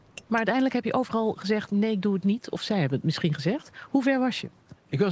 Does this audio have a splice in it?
no; 0 cuts

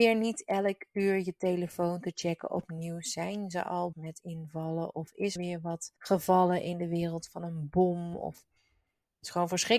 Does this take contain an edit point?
yes; 3 cuts; at 3.9 s, 5.4 s, 6.0 s

